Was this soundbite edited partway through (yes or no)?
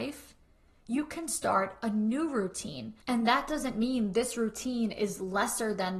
yes